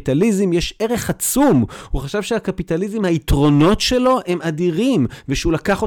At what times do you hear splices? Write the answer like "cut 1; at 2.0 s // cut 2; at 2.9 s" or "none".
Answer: none